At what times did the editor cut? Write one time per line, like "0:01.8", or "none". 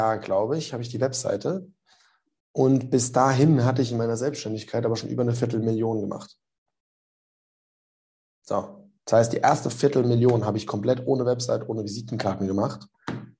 none